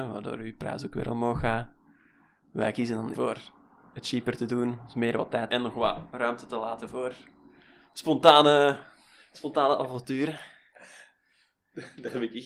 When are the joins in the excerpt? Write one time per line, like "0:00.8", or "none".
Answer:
0:03.1
0:05.5